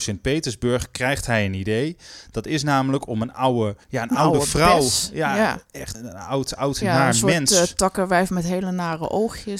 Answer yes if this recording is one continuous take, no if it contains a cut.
no